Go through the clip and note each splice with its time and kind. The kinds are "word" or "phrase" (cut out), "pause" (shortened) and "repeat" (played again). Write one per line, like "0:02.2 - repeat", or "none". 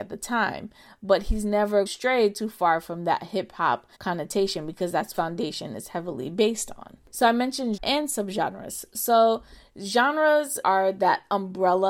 0:01.9 - phrase
0:03.9 - pause
0:05.1 - phrase
0:07.0 - pause
0:07.8 - word
0:10.6 - word